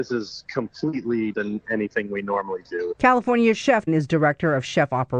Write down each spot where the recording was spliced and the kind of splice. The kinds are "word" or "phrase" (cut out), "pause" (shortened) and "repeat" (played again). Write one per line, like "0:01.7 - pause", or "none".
0:01.3 - word
0:03.9 - phrase